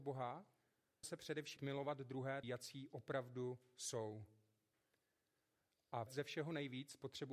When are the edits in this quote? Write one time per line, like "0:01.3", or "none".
0:01.0
0:01.6
0:02.4
0:06.1